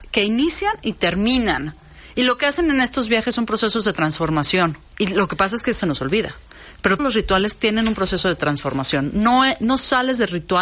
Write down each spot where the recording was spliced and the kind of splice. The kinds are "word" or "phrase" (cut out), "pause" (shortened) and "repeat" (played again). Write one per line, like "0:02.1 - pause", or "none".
0:04.9 - pause
0:05.8 - phrase
0:07.0 - word